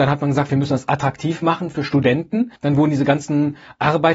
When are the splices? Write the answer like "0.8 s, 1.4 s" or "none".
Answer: 2.6 s